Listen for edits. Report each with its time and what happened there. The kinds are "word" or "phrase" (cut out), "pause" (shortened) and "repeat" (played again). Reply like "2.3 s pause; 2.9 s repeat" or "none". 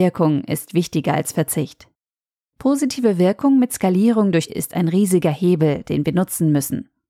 4.5 s word